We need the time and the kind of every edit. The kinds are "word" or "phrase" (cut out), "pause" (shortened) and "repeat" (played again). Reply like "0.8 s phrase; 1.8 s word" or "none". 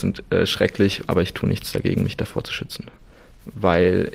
none